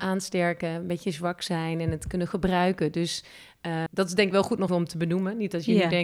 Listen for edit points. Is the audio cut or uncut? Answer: cut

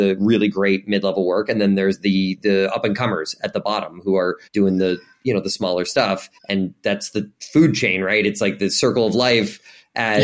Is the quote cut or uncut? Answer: cut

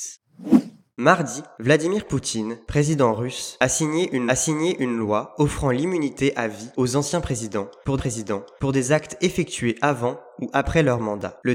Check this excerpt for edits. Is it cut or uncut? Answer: cut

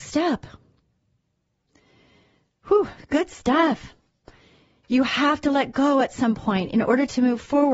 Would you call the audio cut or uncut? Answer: uncut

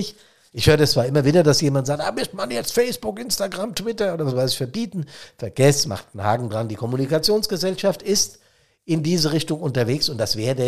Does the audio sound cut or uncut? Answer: uncut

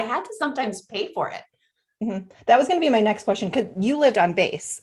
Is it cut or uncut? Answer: uncut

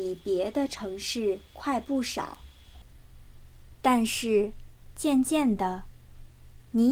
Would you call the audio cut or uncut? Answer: cut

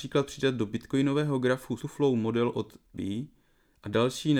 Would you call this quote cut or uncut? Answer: cut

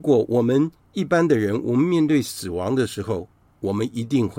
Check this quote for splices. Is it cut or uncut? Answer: uncut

